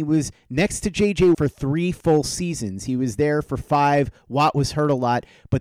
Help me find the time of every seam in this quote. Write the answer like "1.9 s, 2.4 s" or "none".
1.3 s